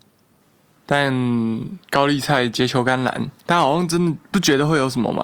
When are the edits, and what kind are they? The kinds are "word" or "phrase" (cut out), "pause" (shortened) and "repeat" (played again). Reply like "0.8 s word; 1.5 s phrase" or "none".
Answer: 1.8 s pause; 3.4 s pause